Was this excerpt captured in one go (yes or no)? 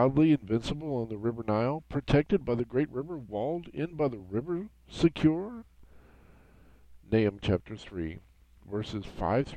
yes